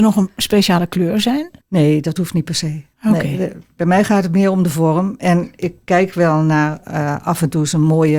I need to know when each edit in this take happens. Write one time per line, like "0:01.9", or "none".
0:01.6
0:02.9